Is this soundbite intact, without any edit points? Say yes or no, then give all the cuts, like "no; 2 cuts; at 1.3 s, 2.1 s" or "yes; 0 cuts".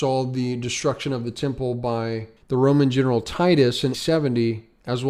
no; 2 cuts; at 2.4 s, 3.9 s